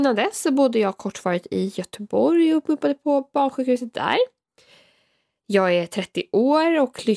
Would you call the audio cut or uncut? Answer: uncut